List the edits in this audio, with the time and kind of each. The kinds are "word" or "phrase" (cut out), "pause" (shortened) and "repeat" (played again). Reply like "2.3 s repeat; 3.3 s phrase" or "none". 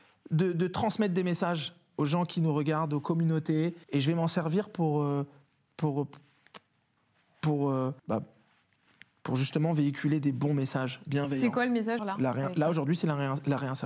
3.8 s pause; 8.0 s pause; 12.0 s word